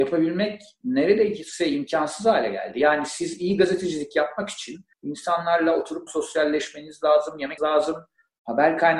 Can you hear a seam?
yes; 3 cuts; at 4.9 s, 6.1 s, 7.6 s

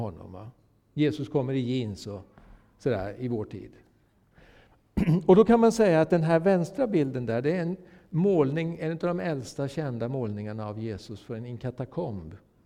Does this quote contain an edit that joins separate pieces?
no; 0 cuts

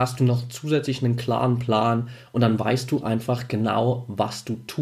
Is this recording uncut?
yes; 0 cuts

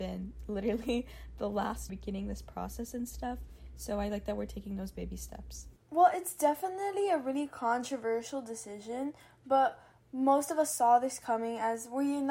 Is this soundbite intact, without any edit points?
no; 1 cut; at 1.9 s

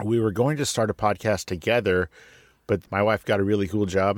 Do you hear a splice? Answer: yes; 1 cut; at 2.8 s

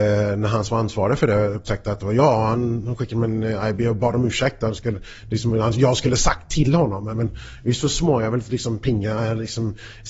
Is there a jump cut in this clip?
no; 0 cuts

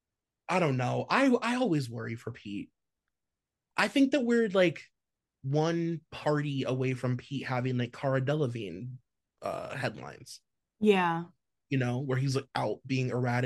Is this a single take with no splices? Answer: yes; 0 cuts

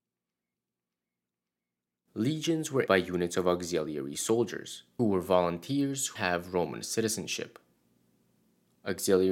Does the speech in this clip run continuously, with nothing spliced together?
no; 3 cuts; at 2.9 s, 5.0 s, 6.2 s

